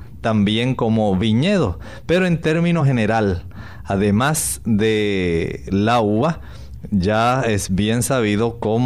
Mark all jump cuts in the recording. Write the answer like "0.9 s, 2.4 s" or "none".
none